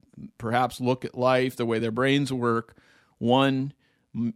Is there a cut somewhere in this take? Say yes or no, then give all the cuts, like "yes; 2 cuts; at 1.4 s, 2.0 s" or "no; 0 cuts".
no; 0 cuts